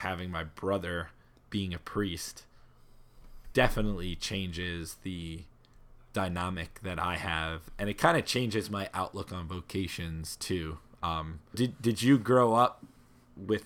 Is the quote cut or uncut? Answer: cut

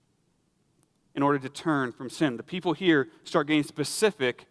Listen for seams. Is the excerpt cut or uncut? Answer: uncut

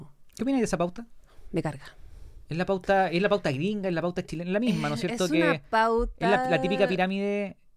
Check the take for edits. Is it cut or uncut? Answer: uncut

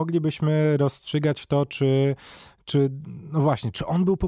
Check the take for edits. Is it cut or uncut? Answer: uncut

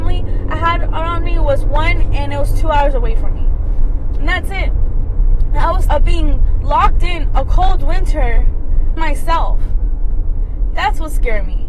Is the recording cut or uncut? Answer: cut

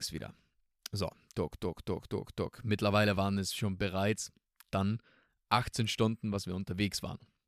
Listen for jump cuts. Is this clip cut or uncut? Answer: cut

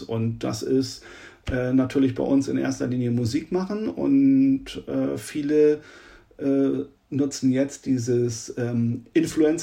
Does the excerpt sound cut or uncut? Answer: uncut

